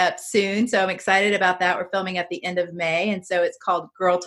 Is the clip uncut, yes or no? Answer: yes